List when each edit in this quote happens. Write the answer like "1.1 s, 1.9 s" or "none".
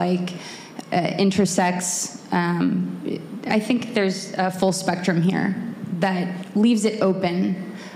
none